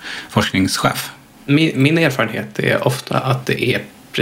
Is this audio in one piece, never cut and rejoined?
yes; 0 cuts

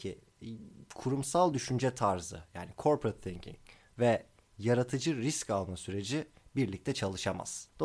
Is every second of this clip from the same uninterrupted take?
yes; 0 cuts

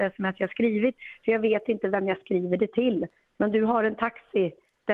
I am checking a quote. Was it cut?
no; 0 cuts

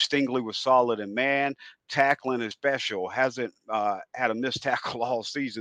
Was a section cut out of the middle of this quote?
yes; 1 cut; at 2.5 s

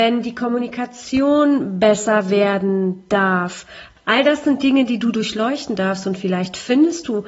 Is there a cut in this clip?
no; 0 cuts

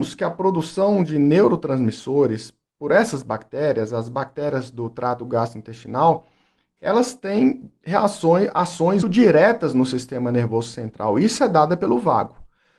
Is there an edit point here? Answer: yes; 1 cut; at 9.0 s

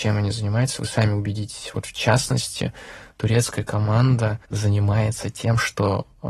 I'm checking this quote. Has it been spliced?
yes; 1 cut; at 4.4 s

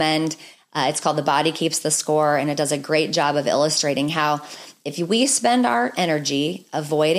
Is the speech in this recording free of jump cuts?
yes; 0 cuts

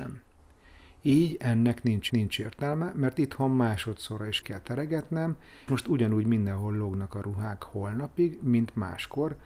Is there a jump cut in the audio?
yes; 3 cuts; at 2.1 s, 4.4 s, 5.7 s

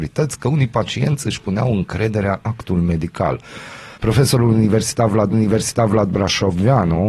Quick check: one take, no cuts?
no; 3 cuts; at 2.4 s, 3.9 s, 5.3 s

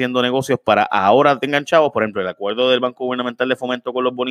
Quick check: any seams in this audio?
no; 0 cuts

